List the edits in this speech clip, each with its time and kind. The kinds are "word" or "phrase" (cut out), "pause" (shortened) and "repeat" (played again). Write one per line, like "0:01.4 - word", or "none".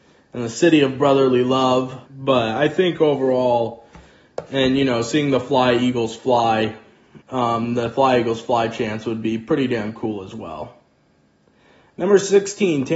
0:02.1 - pause
0:07.2 - pause